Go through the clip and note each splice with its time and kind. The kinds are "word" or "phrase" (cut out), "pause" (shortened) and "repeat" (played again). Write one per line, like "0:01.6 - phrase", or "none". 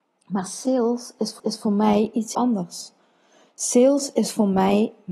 0:01.4 - repeat
0:02.3 - word